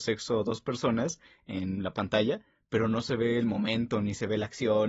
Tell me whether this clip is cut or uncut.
uncut